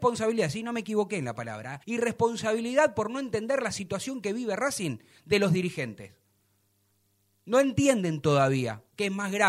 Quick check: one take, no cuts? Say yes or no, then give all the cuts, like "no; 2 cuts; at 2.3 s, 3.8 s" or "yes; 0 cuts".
no; 1 cut; at 1.8 s